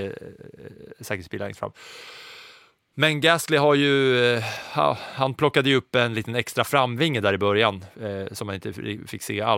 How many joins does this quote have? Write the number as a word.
zero